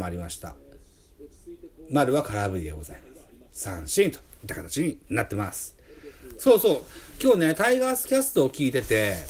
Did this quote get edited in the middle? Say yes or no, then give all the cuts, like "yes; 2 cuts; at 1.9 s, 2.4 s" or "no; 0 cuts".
no; 0 cuts